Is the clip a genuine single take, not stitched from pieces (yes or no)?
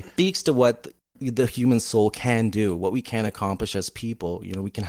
yes